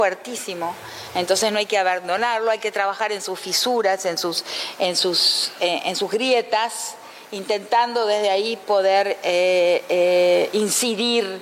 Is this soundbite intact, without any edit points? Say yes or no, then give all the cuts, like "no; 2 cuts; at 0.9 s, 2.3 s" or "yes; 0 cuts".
yes; 0 cuts